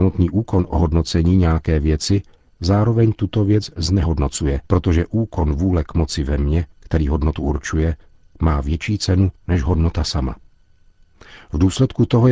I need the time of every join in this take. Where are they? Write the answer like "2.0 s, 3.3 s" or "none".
4.7 s, 6.7 s, 9.4 s

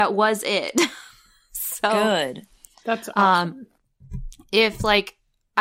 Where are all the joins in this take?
none

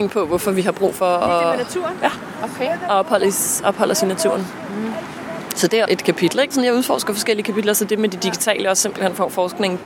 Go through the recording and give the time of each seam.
5.9 s, 6.5 s

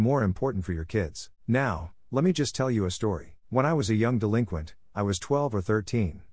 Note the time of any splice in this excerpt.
1.4 s, 3.4 s

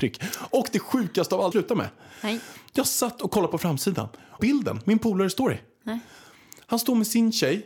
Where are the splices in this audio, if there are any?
1.5 s, 4.4 s

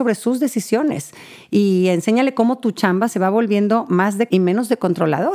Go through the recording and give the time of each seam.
4.3 s

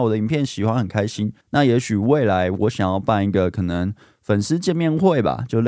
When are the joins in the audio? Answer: 1.4 s

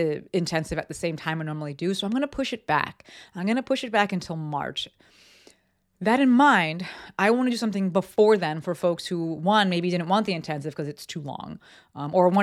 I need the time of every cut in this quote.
none

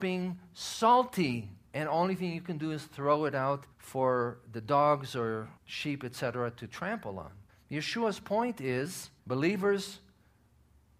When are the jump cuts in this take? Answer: 1.7 s, 3.7 s, 5.6 s, 7.5 s, 9.2 s

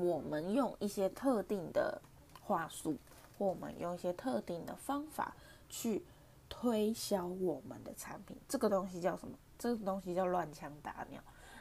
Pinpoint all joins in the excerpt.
8.4 s

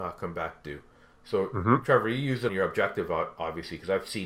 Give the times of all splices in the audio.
2.5 s

